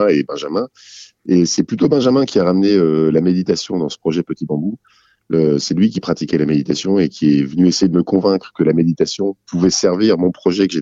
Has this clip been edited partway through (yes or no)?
no